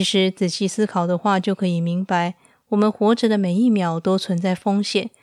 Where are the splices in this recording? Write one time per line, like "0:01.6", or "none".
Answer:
none